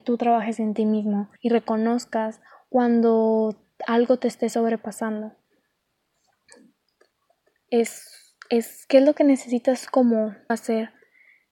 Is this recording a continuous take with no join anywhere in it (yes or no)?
no